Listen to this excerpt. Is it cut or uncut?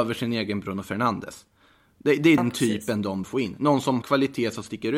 cut